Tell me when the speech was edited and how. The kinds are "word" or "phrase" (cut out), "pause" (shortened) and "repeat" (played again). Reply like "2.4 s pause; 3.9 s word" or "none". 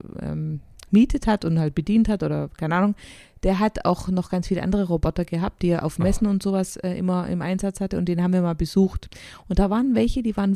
none